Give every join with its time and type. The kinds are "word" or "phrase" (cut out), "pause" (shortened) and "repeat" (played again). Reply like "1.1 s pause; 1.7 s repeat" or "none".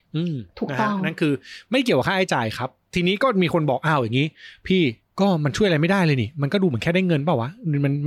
5.0 s pause